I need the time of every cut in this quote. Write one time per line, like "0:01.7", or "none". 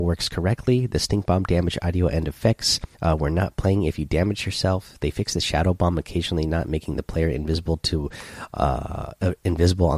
0:02.9